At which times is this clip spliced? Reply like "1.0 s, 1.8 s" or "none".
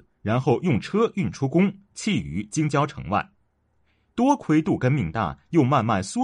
none

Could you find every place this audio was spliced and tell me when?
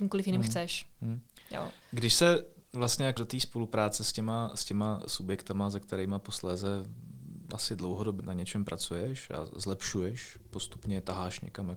0.9 s, 1.8 s, 3.2 s, 8.2 s

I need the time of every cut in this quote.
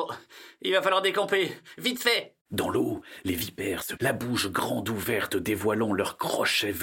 2.4 s, 4.0 s

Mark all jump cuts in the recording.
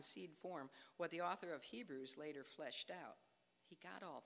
none

